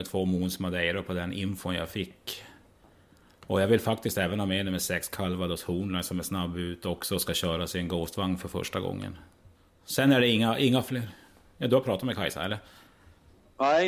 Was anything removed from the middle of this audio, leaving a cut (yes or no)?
no